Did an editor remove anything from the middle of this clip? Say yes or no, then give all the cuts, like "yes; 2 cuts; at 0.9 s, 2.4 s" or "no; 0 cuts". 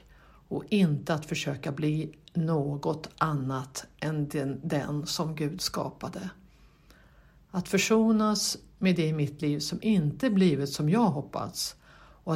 no; 0 cuts